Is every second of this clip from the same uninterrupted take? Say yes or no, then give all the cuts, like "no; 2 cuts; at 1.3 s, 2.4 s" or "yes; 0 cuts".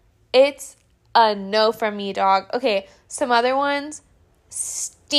yes; 0 cuts